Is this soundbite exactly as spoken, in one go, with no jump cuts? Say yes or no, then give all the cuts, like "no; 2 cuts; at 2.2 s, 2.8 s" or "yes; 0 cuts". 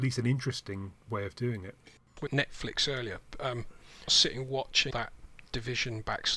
no; 4 cuts; at 1.0 s, 2.3 s, 4.1 s, 4.9 s